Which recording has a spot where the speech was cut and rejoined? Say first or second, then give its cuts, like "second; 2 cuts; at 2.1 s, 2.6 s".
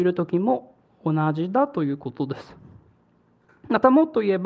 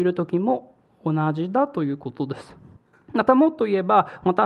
second; 1 cut; at 2.8 s